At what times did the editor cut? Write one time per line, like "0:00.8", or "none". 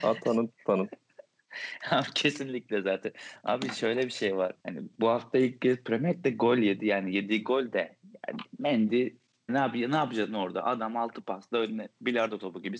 0:04.6
0:09.5

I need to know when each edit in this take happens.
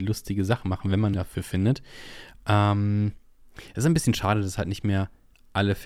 0:01.1

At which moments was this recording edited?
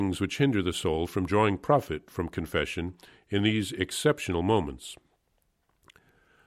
none

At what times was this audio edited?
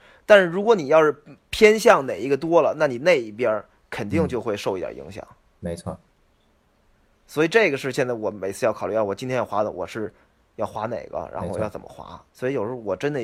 0:12.3

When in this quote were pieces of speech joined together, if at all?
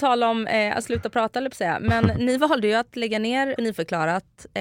0:03.6

